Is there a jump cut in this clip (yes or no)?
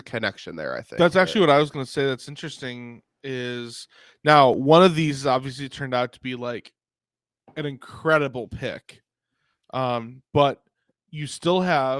no